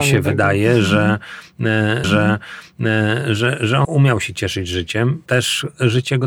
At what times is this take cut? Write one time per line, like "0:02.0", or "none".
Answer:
0:02.0
0:03.8
0:05.3